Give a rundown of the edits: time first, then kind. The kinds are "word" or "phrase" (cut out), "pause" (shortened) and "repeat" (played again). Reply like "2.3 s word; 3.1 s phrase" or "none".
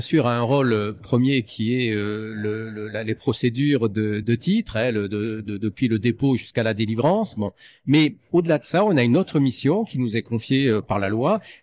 4.2 s word